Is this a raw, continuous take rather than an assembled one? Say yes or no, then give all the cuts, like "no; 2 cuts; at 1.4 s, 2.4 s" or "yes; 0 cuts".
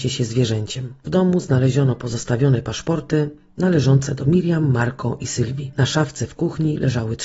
yes; 0 cuts